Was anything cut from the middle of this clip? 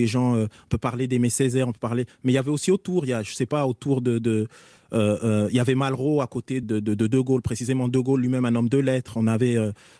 yes; 1 cut; at 6.6 s

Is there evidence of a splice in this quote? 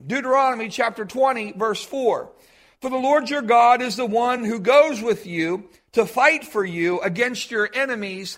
no; 0 cuts

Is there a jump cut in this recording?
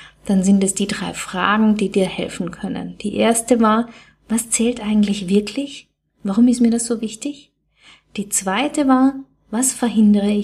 no; 0 cuts

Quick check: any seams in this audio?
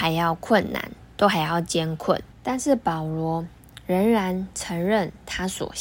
yes; 1 cut; at 2.3 s

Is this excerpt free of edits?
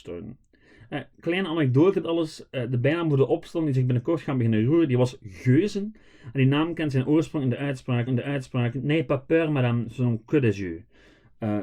no; 2 cuts; at 2.0 s, 8.1 s

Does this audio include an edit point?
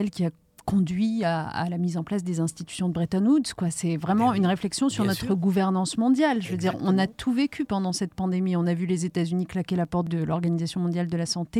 no; 0 cuts

